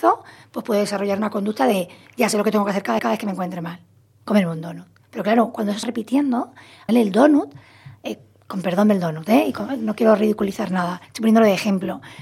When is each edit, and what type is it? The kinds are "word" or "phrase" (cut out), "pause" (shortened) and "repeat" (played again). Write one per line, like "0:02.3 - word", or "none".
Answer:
0:03.0 - repeat
0:05.8 - word
0:06.9 - word
0:11.0 - pause

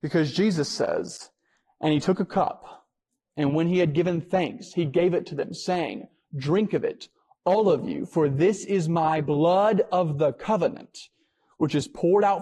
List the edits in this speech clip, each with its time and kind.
none

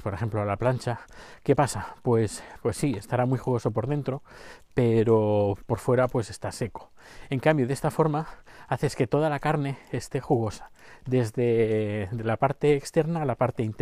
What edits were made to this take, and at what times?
none

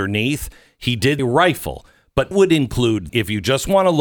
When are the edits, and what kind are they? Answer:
0:01.2 - word
0:02.3 - word
0:03.1 - word

